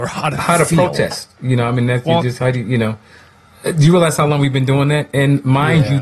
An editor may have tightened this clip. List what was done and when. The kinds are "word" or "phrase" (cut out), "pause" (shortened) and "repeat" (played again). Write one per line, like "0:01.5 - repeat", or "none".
none